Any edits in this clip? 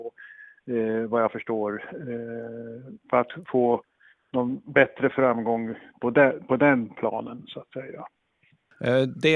no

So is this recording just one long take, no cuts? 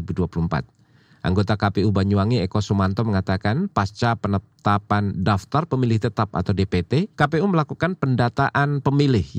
no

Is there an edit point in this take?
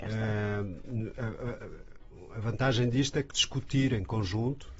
yes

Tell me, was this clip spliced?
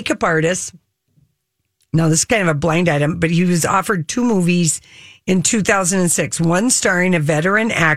no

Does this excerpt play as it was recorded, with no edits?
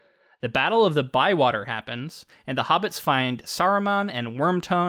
yes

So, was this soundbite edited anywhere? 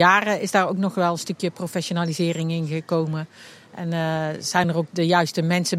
no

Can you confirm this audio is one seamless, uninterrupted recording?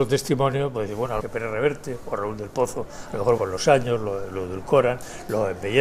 no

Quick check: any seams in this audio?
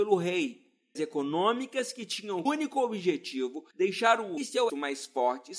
yes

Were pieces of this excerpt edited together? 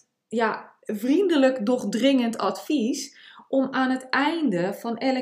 no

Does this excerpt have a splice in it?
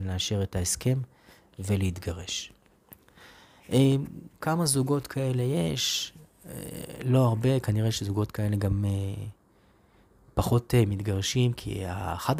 no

